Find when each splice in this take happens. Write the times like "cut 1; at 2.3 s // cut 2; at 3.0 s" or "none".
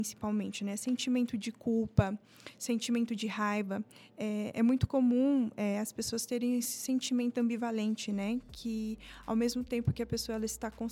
none

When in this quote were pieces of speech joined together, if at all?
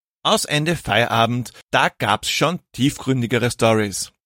cut 1; at 1.6 s

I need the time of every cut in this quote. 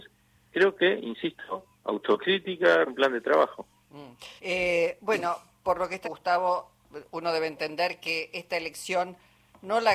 cut 1; at 2.9 s // cut 2; at 4.4 s // cut 3; at 6.0 s

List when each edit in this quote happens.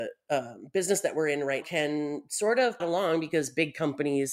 cut 1; at 1.6 s // cut 2; at 2.8 s

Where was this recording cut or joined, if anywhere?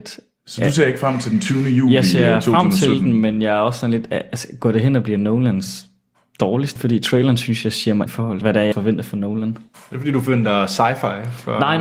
cut 1; at 6.8 s // cut 2; at 8.1 s // cut 3; at 8.4 s // cut 4; at 8.7 s

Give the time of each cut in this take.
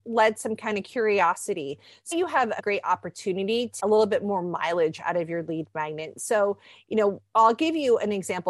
cut 1; at 2.1 s // cut 2; at 2.6 s // cut 3; at 3.8 s

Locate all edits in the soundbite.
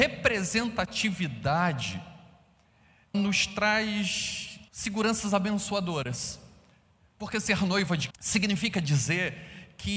cut 1; at 3.1 s // cut 2; at 4.7 s // cut 3; at 8.1 s

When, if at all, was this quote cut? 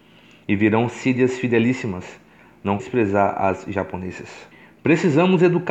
cut 1; at 2.8 s // cut 2; at 4.5 s

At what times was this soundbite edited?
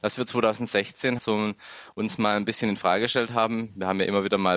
cut 1; at 1.2 s

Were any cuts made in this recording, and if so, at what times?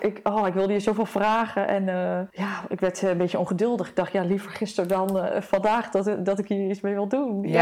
cut 1; at 2.3 s

